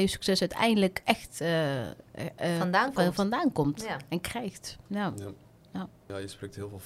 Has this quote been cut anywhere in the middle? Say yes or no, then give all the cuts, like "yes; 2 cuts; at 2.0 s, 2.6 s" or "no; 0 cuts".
no; 0 cuts